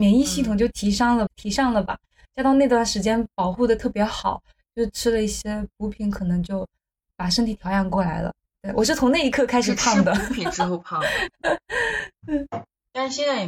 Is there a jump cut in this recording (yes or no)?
yes